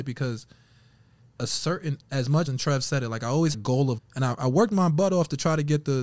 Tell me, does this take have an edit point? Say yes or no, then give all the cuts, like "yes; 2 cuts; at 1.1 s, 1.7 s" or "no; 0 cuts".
yes; 5 cuts; at 1.4 s, 2.0 s, 2.5 s, 3.5 s, 4.0 s